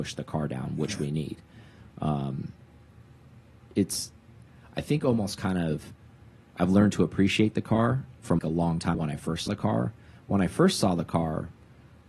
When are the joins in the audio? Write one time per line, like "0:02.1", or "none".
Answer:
0:08.4
0:08.9
0:09.5